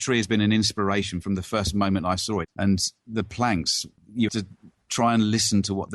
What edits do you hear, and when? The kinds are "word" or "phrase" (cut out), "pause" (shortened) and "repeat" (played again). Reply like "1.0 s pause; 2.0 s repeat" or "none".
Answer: 4.3 s word